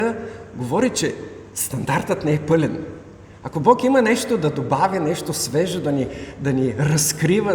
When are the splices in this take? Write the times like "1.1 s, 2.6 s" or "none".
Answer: none